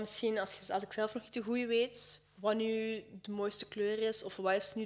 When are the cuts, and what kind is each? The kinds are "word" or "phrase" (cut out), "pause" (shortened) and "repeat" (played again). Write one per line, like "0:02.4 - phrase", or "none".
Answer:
0:02.3 - pause